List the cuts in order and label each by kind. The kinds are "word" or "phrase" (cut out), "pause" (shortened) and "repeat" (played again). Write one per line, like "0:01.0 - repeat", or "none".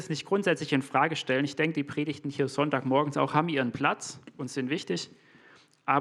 none